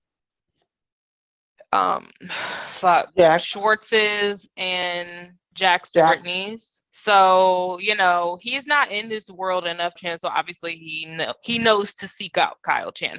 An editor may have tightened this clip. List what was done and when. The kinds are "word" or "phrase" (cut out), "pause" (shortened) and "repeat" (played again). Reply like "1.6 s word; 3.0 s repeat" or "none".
6.9 s pause; 10.0 s phrase